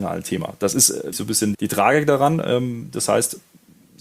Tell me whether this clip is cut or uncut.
cut